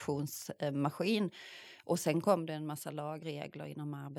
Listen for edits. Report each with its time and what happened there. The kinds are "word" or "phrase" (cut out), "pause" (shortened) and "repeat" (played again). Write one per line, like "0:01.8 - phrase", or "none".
0:03.2 - word